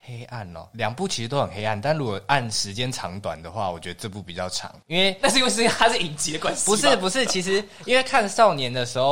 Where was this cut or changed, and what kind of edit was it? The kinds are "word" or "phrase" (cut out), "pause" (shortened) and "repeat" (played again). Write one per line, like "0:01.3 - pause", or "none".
0:04.8 - pause

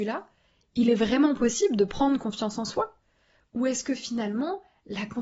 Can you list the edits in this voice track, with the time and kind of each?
none

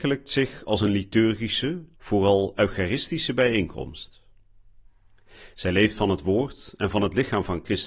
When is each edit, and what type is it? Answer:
0:01.9 - pause

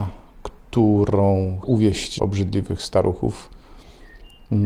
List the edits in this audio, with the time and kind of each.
0:01.6 - word
0:02.2 - word

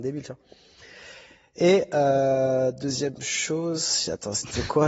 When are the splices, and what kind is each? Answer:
none

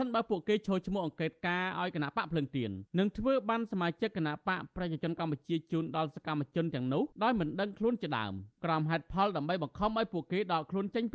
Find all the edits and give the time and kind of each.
0:02.9 - pause
0:07.1 - pause
0:08.6 - pause

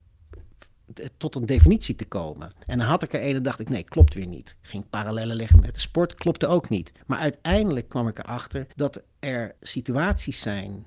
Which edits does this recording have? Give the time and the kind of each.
0:07.0 - pause
0:08.7 - pause
0:09.6 - pause

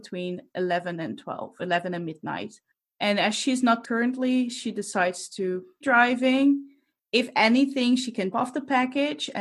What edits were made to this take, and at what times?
0:01.6 - word
0:03.8 - word
0:05.8 - word
0:08.3 - word

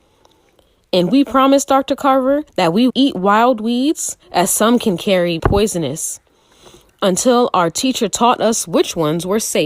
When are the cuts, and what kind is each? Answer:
0:02.5 - pause
0:02.9 - word
0:04.2 - pause
0:05.4 - word

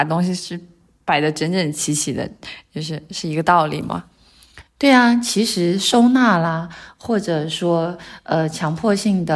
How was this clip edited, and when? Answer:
none

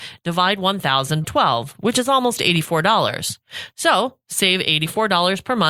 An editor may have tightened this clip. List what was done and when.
0:01.2 - word

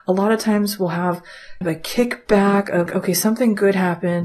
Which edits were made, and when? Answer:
0:01.6 - word
0:02.9 - word

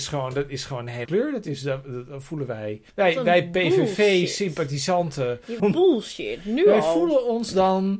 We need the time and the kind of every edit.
0:01.0 - word
0:02.9 - pause
0:05.6 - phrase

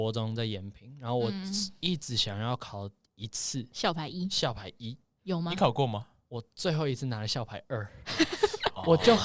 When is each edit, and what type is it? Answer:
none

